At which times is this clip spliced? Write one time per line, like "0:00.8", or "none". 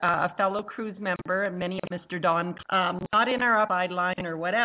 0:01.9
0:02.6
0:03.7